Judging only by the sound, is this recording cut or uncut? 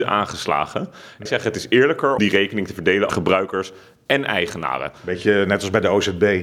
cut